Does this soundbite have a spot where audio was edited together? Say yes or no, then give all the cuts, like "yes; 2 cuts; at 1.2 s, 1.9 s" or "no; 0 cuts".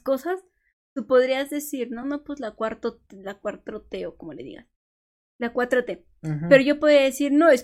no; 0 cuts